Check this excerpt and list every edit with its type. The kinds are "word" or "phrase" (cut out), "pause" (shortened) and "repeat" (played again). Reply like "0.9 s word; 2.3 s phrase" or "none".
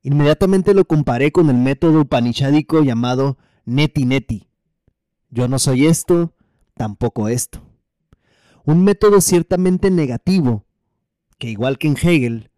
none